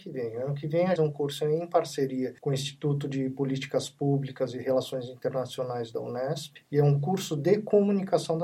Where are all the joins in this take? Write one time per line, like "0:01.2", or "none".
0:01.0
0:02.4
0:06.6